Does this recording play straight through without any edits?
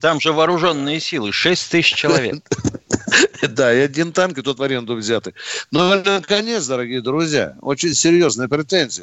yes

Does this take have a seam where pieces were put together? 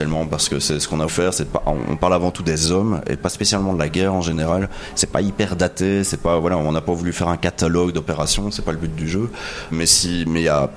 yes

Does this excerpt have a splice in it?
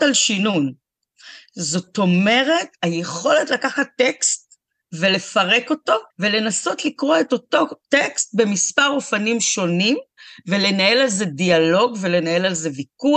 yes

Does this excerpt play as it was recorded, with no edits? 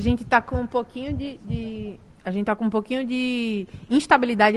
yes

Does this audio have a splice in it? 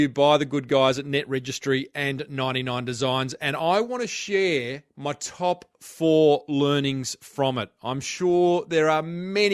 no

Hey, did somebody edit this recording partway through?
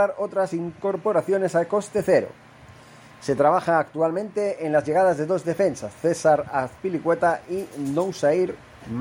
no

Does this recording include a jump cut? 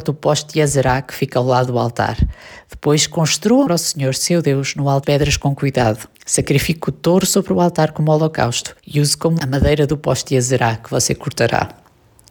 yes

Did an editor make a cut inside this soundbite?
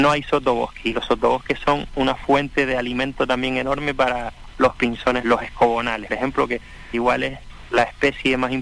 yes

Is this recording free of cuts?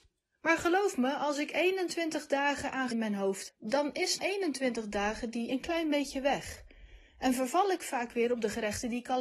no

